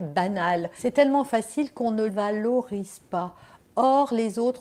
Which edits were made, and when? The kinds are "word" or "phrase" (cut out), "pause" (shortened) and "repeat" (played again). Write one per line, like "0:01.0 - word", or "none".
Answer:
0:02.1 - word